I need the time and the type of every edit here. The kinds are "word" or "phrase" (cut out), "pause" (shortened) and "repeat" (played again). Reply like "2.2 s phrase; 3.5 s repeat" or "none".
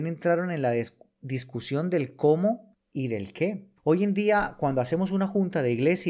none